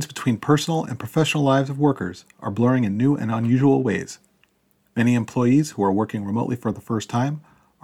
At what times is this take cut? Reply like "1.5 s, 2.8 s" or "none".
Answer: none